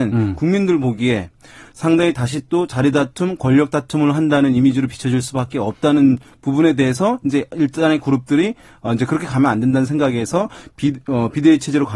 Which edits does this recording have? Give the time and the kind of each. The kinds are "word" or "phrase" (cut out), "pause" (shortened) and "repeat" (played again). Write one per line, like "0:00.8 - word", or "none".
none